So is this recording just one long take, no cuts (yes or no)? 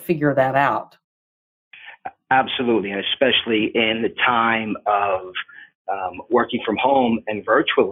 yes